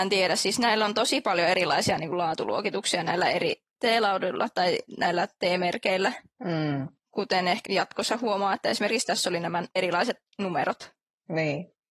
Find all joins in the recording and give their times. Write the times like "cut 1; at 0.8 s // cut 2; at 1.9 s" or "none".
cut 1; at 7.6 s // cut 2; at 9.7 s